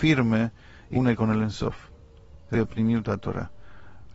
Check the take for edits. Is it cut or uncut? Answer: cut